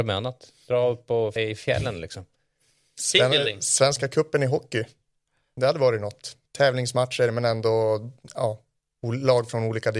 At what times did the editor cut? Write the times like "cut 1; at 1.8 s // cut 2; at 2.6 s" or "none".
cut 1; at 1.4 s // cut 2; at 6.4 s